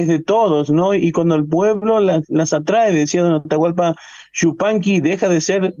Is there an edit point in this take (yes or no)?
no